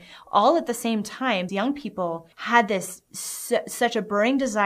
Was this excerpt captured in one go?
no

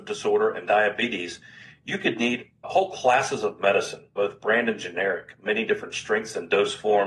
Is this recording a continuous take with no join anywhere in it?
no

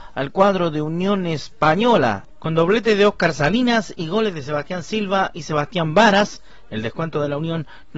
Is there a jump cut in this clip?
no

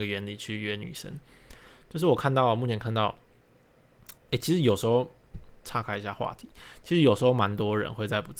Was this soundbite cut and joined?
yes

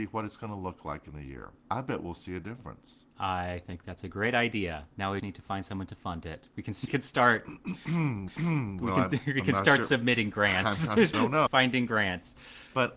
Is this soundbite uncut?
no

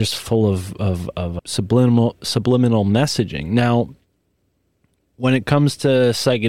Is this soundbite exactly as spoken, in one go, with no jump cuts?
yes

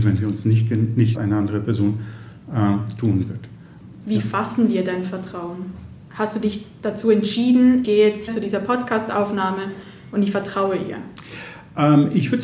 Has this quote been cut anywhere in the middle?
yes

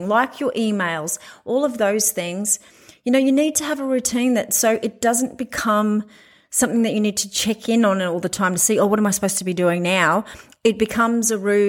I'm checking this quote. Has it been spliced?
no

